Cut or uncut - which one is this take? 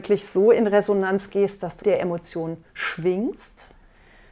cut